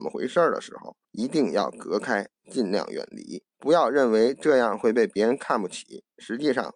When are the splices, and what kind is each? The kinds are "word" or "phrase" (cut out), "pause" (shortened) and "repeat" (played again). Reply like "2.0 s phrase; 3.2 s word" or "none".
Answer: 1.0 s pause; 3.5 s pause